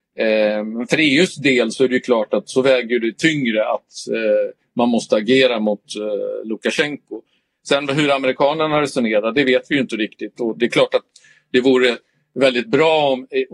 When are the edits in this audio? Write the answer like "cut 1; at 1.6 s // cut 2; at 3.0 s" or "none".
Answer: none